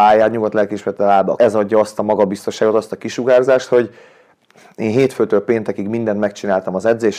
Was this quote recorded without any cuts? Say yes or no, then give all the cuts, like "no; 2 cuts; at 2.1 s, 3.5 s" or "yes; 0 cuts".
no; 1 cut; at 1.4 s